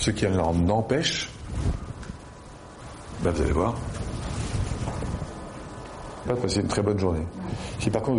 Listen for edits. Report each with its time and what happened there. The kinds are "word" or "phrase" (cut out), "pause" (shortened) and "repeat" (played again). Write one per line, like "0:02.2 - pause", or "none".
0:06.2 - phrase